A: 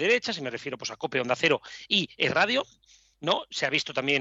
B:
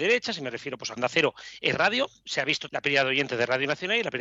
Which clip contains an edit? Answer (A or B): B